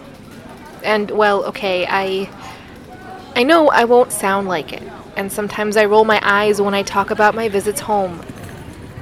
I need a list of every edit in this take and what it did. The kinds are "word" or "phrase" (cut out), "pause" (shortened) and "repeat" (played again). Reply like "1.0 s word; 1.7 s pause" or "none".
4.1 s word